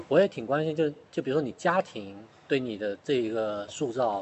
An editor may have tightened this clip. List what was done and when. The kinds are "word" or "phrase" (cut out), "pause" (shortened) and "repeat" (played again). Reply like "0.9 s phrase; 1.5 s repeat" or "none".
1.1 s pause; 2.3 s pause; 3.0 s pause